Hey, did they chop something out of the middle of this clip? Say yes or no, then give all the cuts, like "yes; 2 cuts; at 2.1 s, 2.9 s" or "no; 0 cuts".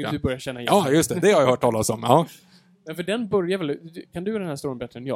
no; 0 cuts